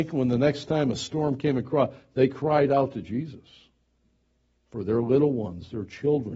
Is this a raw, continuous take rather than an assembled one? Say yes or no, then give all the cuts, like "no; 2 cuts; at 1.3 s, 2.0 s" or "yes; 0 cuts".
yes; 0 cuts